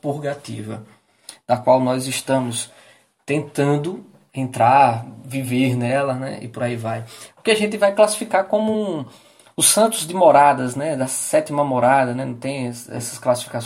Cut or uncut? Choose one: uncut